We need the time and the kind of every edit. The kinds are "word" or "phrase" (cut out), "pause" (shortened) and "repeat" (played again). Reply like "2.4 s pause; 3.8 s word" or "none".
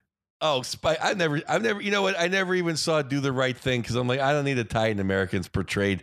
none